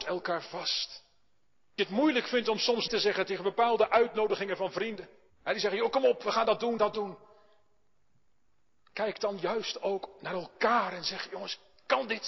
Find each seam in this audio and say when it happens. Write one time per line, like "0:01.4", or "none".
0:01.8
0:02.9
0:05.3
0:06.8